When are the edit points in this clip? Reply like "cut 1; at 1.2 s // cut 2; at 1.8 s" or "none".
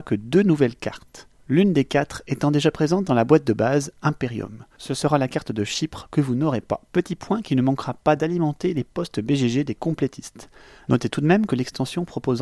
none

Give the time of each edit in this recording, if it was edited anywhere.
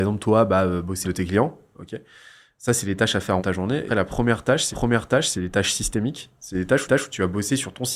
cut 1; at 1.0 s // cut 2; at 3.4 s // cut 3; at 3.9 s // cut 4; at 4.7 s // cut 5; at 6.9 s

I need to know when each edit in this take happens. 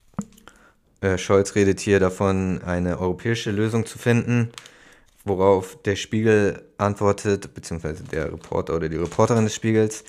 none

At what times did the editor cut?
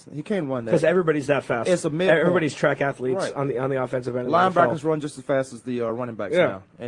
none

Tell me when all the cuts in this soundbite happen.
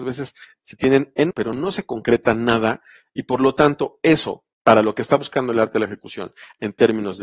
cut 1; at 1.3 s // cut 2; at 4.5 s

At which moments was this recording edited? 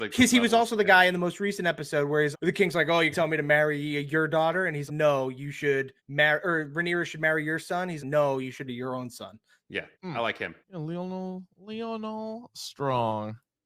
cut 1; at 2.3 s // cut 2; at 3.1 s // cut 3; at 4.9 s // cut 4; at 6.0 s // cut 5; at 8.0 s // cut 6; at 8.7 s // cut 7; at 9.9 s // cut 8; at 10.6 s

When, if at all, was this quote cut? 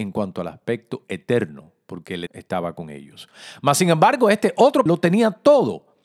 cut 1; at 2.3 s // cut 2; at 4.9 s

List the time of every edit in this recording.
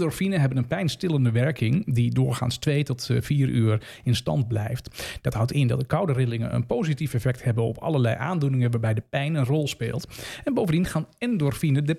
none

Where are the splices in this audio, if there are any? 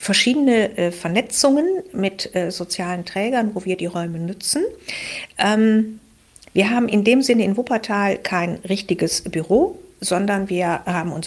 none

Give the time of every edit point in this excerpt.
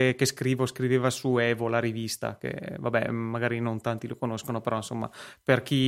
none

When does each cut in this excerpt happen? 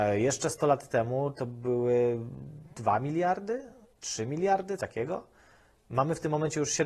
cut 1; at 3.8 s // cut 2; at 4.8 s

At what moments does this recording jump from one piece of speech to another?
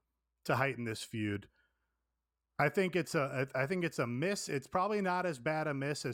none

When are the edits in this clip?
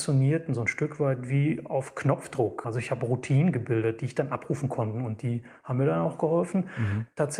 none

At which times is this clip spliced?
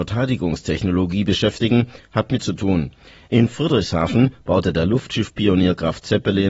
cut 1; at 2.4 s

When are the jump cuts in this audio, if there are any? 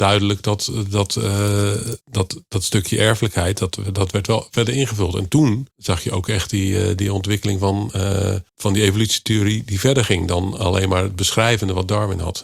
cut 1; at 2.0 s // cut 2; at 5.7 s // cut 3; at 8.5 s

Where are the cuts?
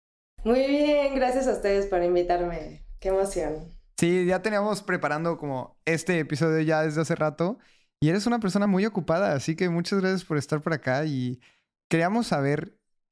none

